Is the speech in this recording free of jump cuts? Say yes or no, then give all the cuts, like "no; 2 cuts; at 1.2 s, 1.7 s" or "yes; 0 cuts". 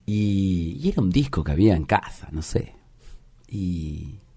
yes; 0 cuts